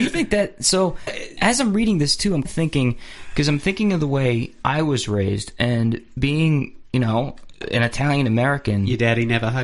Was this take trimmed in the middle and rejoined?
yes; 3 cuts; at 1.1 s, 2.4 s, 4.6 s

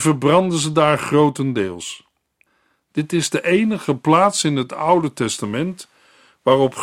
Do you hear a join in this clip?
no; 0 cuts

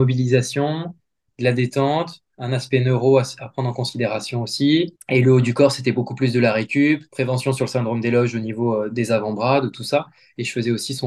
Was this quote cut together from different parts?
no; 0 cuts

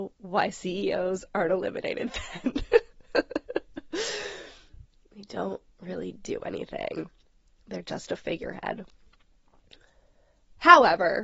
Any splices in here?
no; 0 cuts

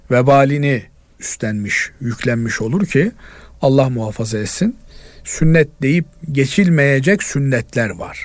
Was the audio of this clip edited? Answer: no; 0 cuts

